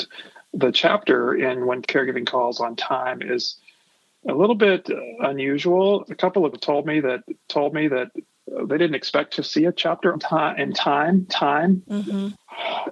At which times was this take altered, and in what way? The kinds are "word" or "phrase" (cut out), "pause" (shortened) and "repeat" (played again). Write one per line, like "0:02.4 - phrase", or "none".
0:01.8 - word
0:06.1 - word
0:06.5 - word
0:07.5 - repeat
0:10.1 - word
0:11.3 - repeat